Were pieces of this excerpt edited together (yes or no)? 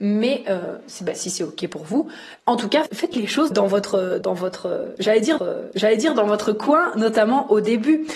yes